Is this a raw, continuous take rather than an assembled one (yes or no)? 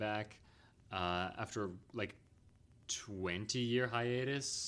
yes